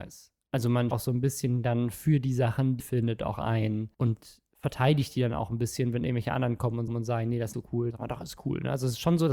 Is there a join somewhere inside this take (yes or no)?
yes